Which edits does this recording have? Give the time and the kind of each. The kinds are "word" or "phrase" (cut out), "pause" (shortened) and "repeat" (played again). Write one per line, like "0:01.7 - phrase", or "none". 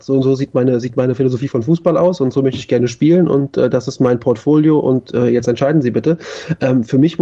none